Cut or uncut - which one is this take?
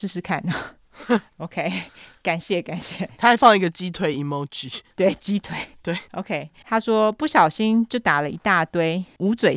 uncut